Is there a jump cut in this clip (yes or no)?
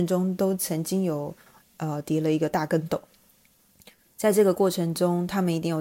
no